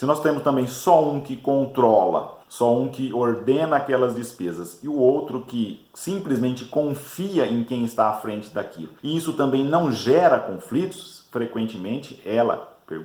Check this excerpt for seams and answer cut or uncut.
cut